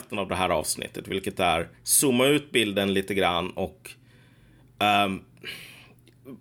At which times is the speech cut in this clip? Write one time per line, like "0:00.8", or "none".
0:01.7